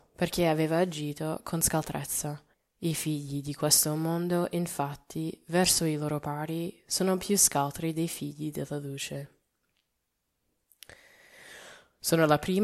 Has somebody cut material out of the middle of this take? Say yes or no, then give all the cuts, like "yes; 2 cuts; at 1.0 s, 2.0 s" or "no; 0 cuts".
yes; 1 cut; at 2.5 s